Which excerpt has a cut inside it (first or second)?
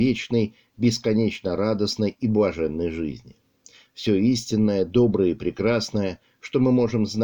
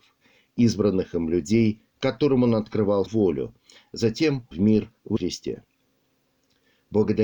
second